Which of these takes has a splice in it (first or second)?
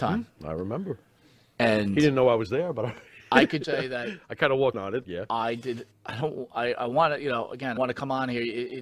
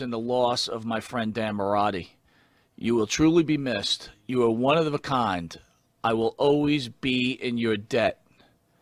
first